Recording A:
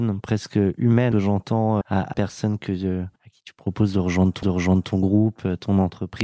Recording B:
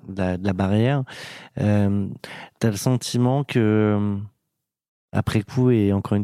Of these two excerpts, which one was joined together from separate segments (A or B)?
A